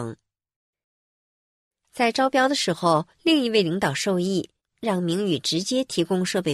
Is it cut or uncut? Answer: cut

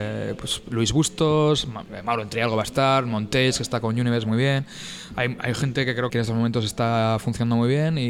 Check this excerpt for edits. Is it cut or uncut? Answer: cut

